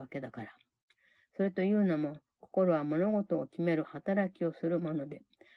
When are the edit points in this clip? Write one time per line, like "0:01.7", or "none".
none

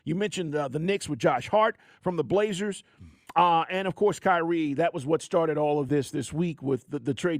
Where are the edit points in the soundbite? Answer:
none

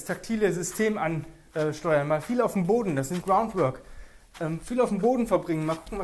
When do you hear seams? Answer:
0:03.2

